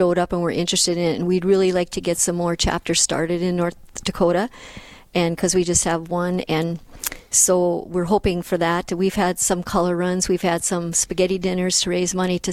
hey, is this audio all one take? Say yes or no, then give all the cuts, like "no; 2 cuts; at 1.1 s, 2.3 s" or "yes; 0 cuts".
yes; 0 cuts